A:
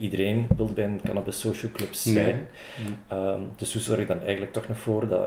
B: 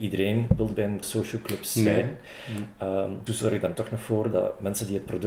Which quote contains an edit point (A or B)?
B